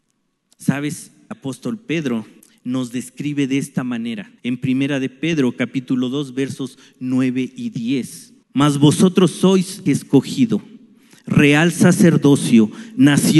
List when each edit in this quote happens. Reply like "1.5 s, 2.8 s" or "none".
1.3 s, 2.4 s, 4.4 s, 8.4 s, 9.9 s